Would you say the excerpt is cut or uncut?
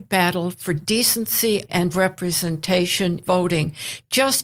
cut